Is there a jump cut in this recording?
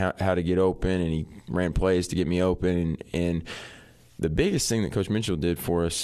no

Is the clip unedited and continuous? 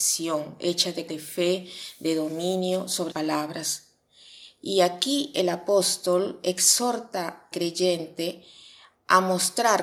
no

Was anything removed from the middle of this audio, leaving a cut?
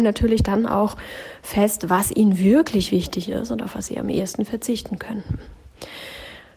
no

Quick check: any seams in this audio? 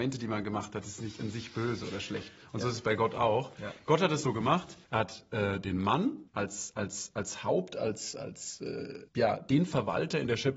yes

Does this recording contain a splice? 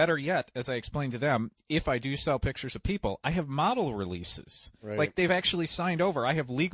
no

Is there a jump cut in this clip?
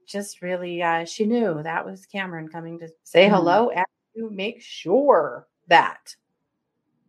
yes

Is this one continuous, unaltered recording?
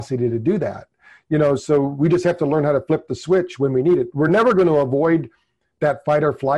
yes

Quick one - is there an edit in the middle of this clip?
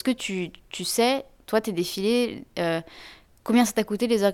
no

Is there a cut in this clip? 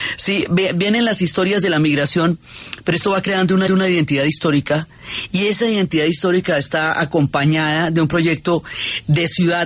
yes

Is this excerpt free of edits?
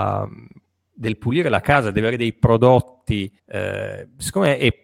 no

